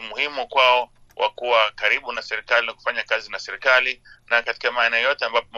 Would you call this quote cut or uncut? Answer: uncut